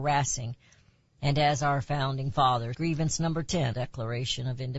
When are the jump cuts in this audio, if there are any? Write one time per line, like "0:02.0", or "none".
0:02.7
0:03.7